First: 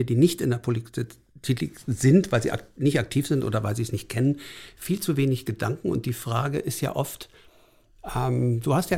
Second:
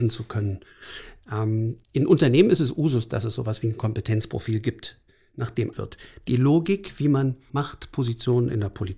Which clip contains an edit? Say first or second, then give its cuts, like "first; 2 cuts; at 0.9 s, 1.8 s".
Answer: second; 3 cuts; at 1.8 s, 5.7 s, 7.5 s